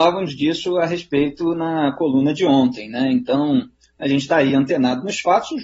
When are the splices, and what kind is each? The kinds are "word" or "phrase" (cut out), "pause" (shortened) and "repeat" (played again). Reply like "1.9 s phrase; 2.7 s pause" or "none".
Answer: none